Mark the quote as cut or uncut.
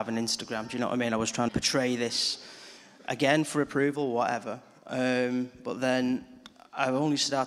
cut